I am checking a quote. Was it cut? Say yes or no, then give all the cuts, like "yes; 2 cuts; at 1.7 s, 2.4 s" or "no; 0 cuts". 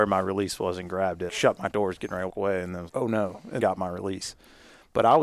yes; 5 cuts; at 1.3 s, 1.7 s, 2.3 s, 2.9 s, 3.6 s